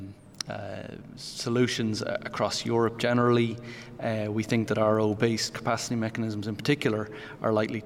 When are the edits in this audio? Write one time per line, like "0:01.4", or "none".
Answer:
none